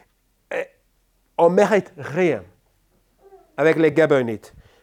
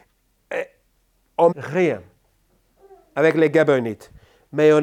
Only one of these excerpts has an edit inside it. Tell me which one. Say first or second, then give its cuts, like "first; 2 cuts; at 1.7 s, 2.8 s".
second; 1 cut; at 1.5 s